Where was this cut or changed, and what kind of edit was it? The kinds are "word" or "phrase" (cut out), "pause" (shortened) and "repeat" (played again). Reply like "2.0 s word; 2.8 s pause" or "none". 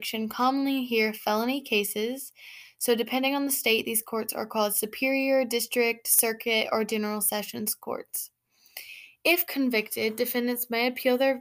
none